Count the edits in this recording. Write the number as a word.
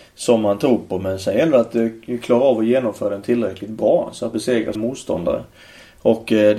two